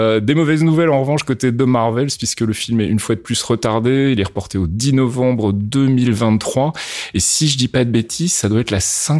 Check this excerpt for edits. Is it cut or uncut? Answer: uncut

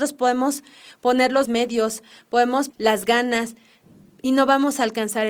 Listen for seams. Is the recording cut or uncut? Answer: cut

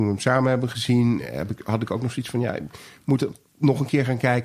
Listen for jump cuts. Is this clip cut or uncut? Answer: uncut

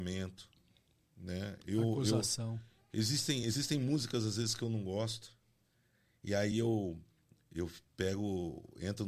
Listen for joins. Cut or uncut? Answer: uncut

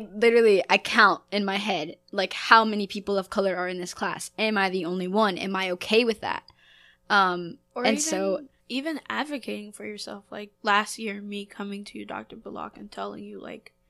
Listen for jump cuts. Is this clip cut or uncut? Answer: cut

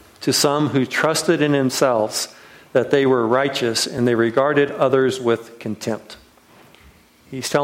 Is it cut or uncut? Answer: uncut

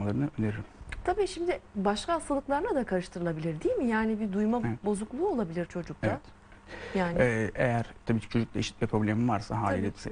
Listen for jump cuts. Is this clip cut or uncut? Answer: uncut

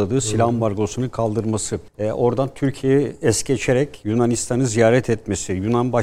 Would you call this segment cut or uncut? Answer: cut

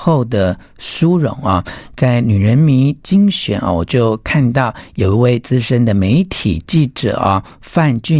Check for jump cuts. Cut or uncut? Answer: uncut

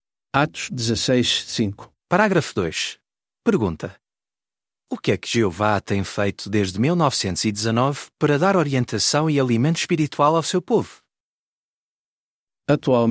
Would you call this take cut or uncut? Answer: cut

